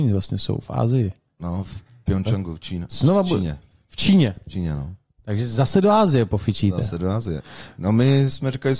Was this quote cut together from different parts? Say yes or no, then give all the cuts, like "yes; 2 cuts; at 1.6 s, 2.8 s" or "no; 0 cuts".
no; 0 cuts